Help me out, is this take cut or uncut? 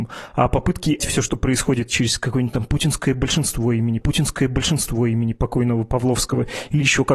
cut